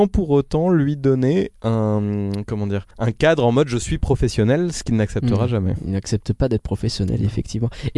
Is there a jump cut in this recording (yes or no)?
yes